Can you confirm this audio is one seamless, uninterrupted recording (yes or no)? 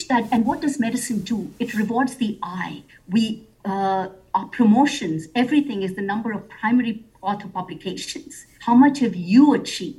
no